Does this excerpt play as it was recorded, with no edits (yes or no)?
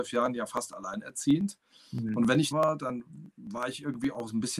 no